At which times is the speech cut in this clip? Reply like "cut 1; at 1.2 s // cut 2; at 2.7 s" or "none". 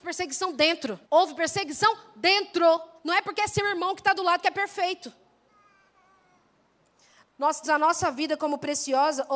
cut 1; at 1.0 s // cut 2; at 3.0 s // cut 3; at 7.6 s